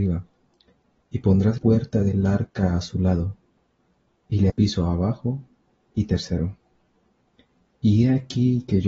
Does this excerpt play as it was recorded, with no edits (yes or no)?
no